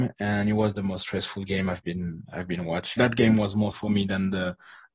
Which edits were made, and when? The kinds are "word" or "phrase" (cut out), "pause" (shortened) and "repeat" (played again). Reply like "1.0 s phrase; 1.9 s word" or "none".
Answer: 3.0 s word; 3.7 s word